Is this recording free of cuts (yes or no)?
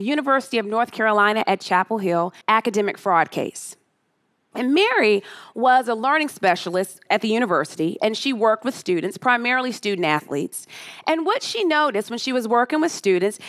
no